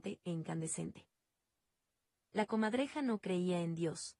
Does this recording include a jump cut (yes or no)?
no